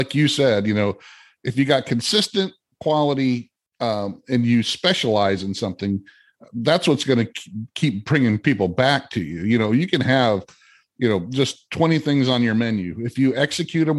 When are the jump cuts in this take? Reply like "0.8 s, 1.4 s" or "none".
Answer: none